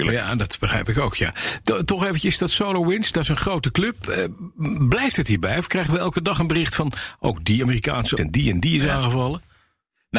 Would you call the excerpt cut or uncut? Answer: cut